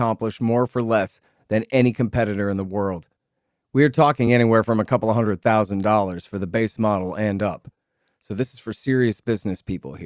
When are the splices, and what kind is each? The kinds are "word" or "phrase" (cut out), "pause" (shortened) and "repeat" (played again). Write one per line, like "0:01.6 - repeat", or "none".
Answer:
none